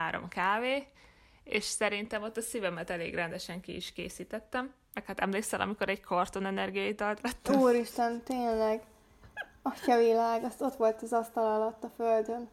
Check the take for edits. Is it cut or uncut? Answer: uncut